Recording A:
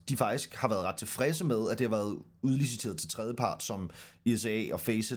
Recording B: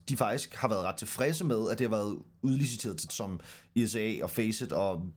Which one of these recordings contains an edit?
B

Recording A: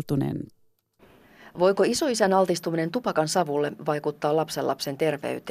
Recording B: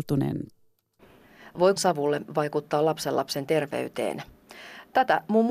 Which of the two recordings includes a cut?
B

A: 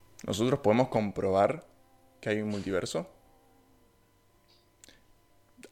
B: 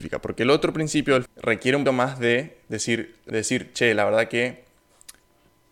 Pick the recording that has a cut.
B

